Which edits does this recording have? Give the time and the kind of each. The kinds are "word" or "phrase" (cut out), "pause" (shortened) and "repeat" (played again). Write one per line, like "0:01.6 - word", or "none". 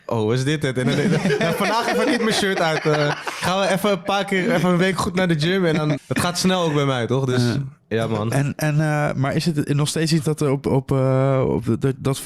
0:06.0 - word